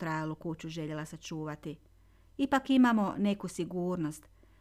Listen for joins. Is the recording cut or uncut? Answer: uncut